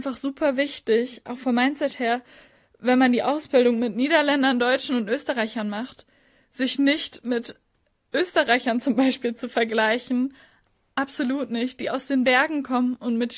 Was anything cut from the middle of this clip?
no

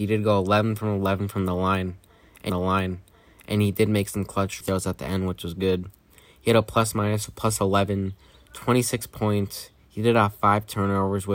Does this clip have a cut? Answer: yes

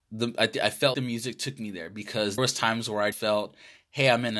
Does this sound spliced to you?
yes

